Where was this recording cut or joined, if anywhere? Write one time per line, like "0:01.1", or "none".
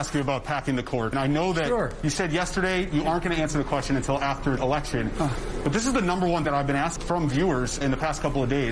0:01.1
0:04.6
0:06.4
0:07.0
0:07.8